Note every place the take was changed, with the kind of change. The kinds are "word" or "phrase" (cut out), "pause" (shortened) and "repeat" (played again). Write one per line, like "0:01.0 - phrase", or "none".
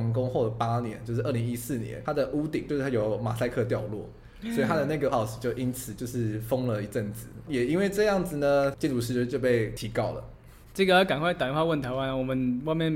0:05.1 - word